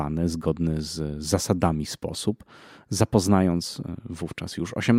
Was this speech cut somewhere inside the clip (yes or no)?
no